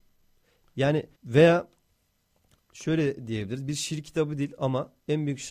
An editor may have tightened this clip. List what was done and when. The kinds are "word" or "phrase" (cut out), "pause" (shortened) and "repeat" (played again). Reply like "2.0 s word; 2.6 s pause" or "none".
1.2 s word